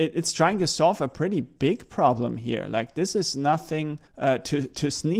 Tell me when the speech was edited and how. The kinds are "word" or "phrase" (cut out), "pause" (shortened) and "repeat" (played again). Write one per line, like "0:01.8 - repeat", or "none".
0:04.1 - pause